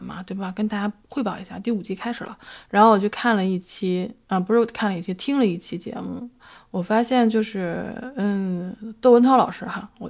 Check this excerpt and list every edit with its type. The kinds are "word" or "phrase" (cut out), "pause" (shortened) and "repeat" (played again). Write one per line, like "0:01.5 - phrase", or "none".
none